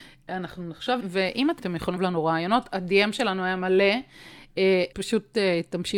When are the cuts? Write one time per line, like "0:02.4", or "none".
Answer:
0:01.0
0:01.6
0:02.0
0:04.9